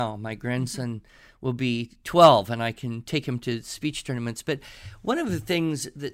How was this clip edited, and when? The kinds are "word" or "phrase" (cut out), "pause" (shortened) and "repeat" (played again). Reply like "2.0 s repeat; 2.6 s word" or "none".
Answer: none